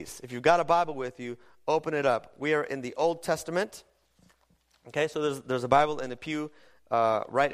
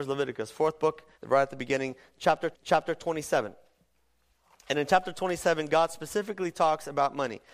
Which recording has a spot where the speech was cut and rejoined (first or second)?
second